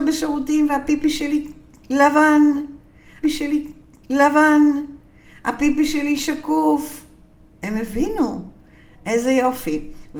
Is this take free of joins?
no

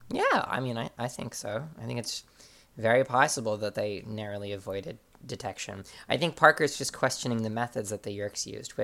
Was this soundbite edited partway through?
no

